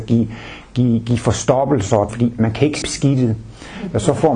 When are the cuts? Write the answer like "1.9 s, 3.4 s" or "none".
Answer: 2.1 s, 2.8 s